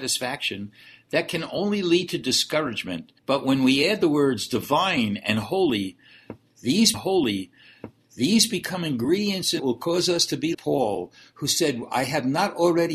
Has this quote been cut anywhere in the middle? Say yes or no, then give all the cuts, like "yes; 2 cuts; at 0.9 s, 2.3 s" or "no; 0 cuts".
yes; 4 cuts; at 3.2 s, 6.9 s, 9.6 s, 10.5 s